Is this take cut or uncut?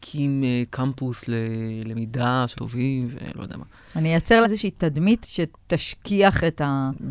cut